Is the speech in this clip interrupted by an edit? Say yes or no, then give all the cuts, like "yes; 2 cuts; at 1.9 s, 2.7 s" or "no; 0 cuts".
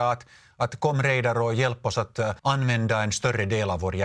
yes; 1 cut; at 2.4 s